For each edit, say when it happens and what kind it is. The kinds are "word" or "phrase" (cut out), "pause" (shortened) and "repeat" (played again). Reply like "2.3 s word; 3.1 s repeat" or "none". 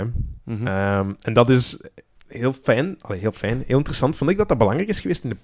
2.1 s pause

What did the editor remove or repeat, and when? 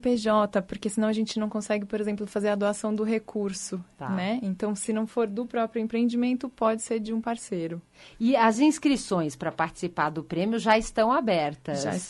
none

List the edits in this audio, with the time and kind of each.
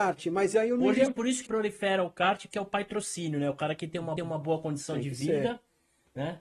1.1 s word; 1.5 s word; 4.2 s repeat

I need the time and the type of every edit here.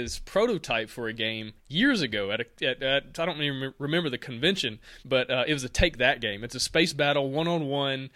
1.6 s pause; 5.0 s pause

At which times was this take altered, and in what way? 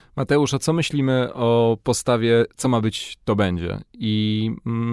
none

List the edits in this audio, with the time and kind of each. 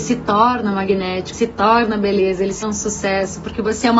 1.3 s word; 2.6 s word

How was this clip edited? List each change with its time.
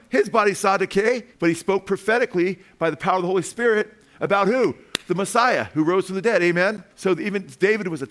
1.3 s pause; 6.9 s pause

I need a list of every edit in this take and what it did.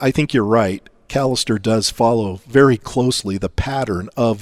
none

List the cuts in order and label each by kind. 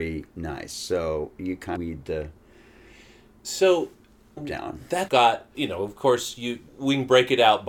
1.8 s word; 4.4 s word; 5.1 s phrase; 5.5 s word; 6.7 s pause

